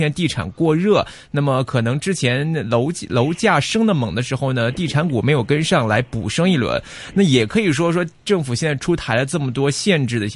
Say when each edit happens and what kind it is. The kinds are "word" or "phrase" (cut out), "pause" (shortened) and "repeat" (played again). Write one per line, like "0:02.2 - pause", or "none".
0:08.2 - pause